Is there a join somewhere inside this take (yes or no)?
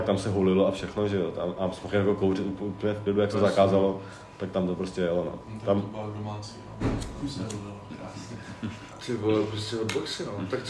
yes